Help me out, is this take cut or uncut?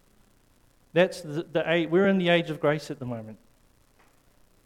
uncut